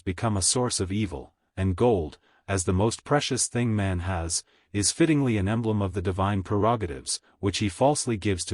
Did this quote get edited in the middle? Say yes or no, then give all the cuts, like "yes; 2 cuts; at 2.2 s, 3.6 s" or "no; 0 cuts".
no; 0 cuts